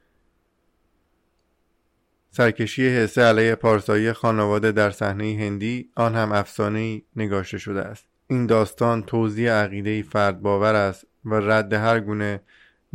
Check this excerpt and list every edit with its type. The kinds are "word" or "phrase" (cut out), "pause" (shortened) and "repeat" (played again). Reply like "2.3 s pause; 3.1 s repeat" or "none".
5.9 s pause; 8.2 s pause